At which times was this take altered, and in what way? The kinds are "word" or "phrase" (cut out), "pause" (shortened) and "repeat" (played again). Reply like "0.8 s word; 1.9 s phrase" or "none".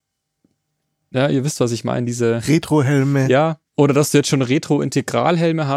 3.7 s pause